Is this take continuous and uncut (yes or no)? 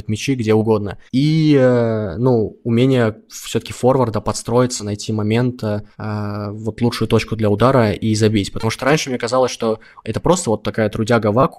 no